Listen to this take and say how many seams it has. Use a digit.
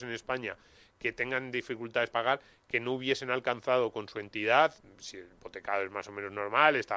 1